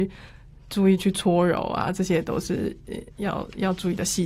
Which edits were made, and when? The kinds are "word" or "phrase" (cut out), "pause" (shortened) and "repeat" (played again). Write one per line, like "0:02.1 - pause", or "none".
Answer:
none